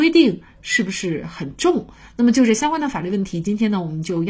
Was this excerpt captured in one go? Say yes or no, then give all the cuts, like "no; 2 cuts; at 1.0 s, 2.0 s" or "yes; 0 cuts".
yes; 0 cuts